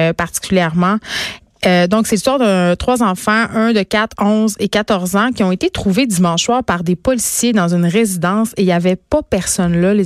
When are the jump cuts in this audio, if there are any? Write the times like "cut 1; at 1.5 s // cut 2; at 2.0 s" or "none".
none